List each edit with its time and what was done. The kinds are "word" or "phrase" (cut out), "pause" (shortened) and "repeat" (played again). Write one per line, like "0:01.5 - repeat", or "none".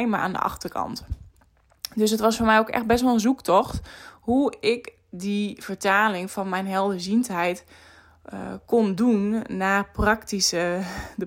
none